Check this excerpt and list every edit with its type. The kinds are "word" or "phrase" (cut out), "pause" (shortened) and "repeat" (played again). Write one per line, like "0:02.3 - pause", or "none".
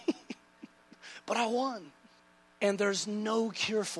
none